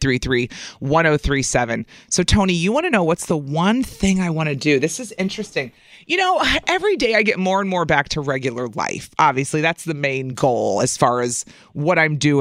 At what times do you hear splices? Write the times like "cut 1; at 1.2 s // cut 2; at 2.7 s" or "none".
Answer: none